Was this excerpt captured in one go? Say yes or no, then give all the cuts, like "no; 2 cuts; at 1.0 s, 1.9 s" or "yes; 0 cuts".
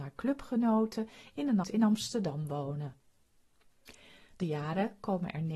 no; 2 cuts; at 1.6 s, 4.4 s